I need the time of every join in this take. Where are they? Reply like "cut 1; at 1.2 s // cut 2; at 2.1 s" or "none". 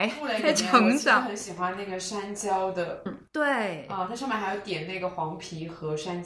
cut 1; at 3.1 s